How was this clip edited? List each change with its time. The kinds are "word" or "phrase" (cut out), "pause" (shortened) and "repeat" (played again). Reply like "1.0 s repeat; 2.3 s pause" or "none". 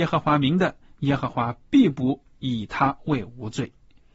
2.3 s pause